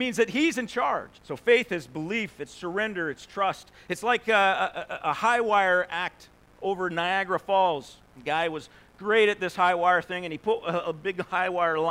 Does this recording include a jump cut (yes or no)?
yes